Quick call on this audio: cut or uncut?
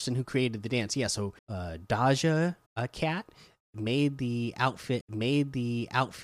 cut